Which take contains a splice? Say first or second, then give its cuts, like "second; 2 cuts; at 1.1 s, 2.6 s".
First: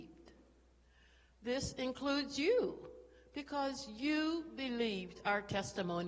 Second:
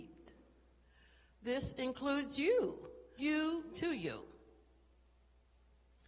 second; 2 cuts; at 3.2 s, 3.7 s